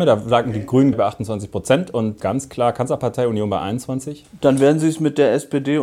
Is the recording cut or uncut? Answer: cut